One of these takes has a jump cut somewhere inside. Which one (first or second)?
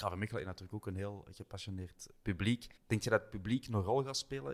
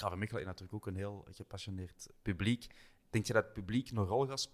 first